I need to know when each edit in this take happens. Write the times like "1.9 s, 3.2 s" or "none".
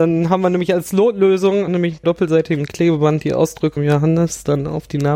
1.7 s, 2.0 s, 3.8 s